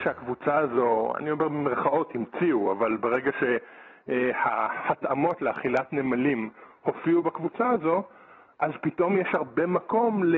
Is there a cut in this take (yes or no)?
no